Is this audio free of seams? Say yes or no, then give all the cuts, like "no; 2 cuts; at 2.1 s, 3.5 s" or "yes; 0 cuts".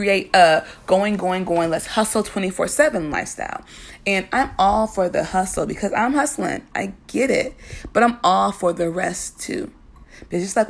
yes; 0 cuts